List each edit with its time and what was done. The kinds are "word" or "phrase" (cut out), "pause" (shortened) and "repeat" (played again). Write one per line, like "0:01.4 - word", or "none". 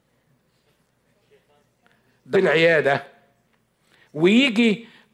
0:02.3 - phrase